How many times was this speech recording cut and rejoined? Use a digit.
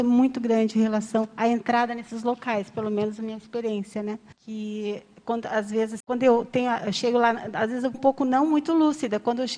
3